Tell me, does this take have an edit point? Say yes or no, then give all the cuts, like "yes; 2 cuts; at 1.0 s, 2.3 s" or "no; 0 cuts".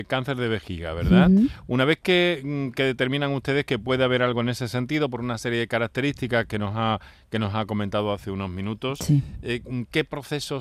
no; 0 cuts